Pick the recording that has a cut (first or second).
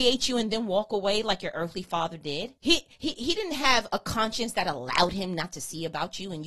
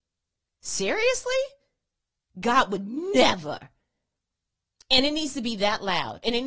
first